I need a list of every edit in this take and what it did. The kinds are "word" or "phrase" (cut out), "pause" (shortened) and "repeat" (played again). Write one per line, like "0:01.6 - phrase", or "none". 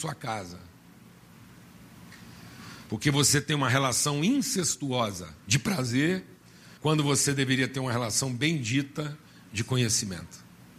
0:05.4 - pause
0:06.8 - pause